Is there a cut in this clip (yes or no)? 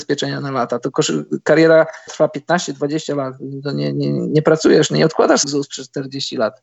yes